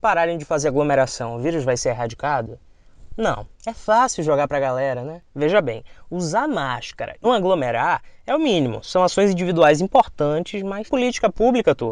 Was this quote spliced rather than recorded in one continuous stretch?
yes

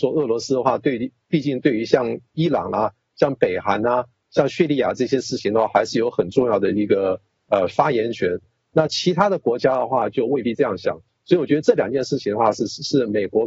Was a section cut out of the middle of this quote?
no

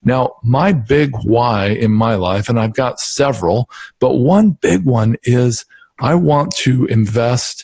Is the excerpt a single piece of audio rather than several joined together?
yes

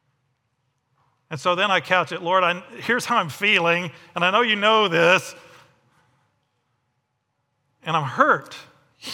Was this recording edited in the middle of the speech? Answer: no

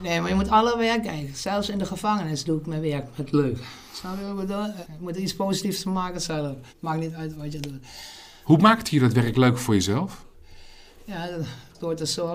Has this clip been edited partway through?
yes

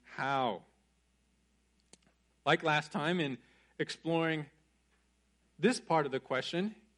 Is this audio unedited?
yes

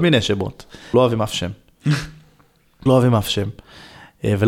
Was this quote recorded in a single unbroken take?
no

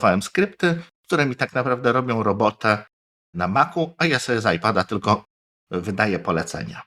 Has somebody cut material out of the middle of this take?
no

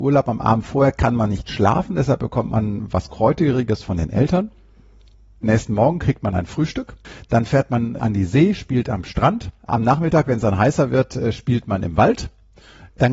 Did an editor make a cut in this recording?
yes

